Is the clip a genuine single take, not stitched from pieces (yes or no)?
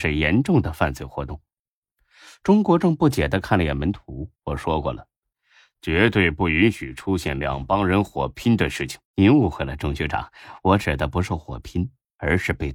no